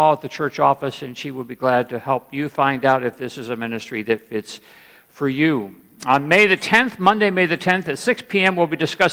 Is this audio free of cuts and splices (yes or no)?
yes